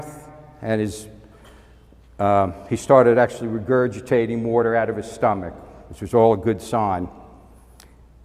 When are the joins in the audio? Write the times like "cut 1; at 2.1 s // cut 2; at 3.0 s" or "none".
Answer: none